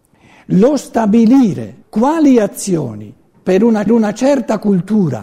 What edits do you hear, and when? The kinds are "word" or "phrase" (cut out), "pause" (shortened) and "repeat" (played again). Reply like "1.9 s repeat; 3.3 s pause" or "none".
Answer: 1.8 s pause; 3.9 s repeat